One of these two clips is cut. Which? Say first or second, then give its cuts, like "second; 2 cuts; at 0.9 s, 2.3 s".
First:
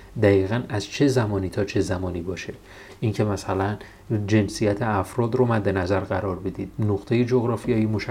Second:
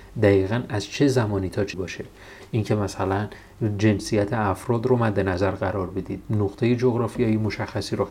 second; 1 cut; at 1.7 s